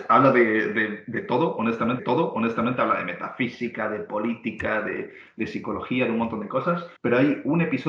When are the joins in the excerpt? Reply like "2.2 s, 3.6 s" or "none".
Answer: 2.0 s, 7.0 s